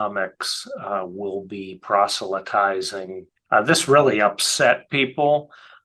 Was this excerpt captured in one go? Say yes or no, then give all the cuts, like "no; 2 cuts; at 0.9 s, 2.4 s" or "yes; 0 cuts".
yes; 0 cuts